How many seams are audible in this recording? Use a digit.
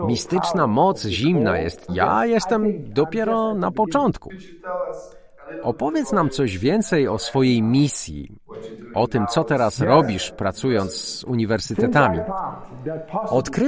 1